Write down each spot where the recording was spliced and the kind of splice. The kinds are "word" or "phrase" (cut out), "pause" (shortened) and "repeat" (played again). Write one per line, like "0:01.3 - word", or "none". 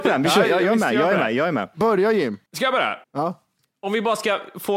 0:02.5 - pause
0:03.0 - pause